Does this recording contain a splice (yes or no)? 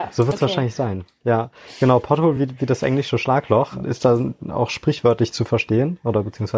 no